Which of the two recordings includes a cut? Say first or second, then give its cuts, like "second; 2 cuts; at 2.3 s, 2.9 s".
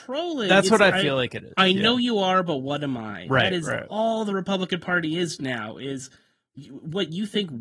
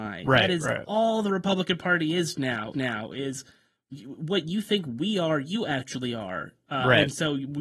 second; 1 cut; at 2.7 s